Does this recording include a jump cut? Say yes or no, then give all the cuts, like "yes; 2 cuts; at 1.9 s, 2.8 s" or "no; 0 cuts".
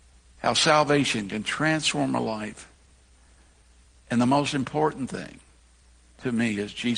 no; 0 cuts